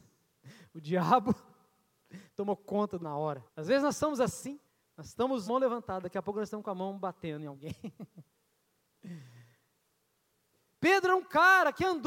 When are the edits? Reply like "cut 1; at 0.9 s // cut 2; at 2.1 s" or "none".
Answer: cut 1; at 3.0 s // cut 2; at 3.5 s // cut 3; at 4.7 s // cut 4; at 5.5 s